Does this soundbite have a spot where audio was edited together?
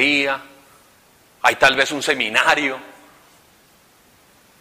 no; 0 cuts

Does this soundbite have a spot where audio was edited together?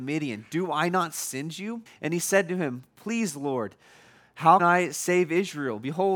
yes; 2 cuts; at 1.9 s, 4.6 s

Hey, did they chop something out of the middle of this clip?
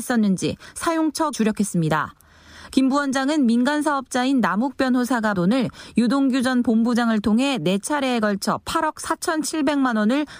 yes; 2 cuts; at 1.3 s, 5.3 s

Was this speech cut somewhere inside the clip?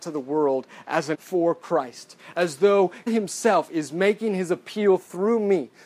yes; 2 cuts; at 1.1 s, 3.1 s

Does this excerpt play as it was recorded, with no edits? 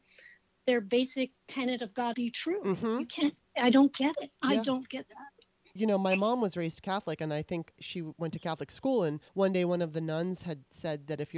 no; 6 cuts; at 1.4 s, 2.1 s, 4.3 s, 5.8 s, 7.7 s, 9.3 s

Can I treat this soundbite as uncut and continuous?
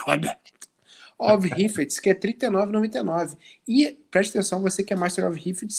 yes; 0 cuts

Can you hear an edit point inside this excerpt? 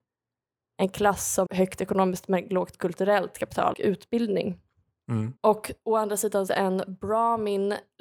yes; 4 cuts; at 1.5 s, 3.7 s, 5.4 s, 6.5 s

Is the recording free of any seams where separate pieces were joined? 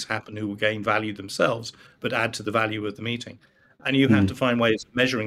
yes; 0 cuts

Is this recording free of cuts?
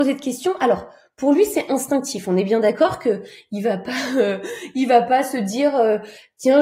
yes; 0 cuts

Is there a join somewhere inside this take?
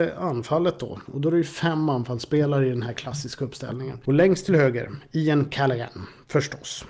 no; 0 cuts

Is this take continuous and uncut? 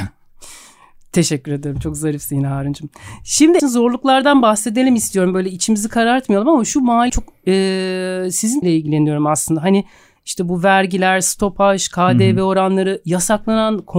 no; 3 cuts; at 3.6 s, 7.1 s, 8.6 s

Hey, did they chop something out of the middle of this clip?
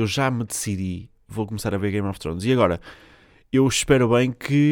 no; 0 cuts

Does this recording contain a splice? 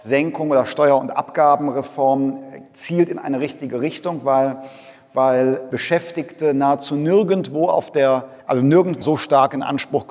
yes; 4 cuts; at 2.7 s, 5.7 s, 8.4 s, 9.0 s

